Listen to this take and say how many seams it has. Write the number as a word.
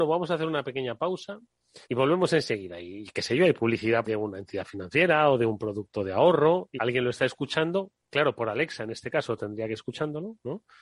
four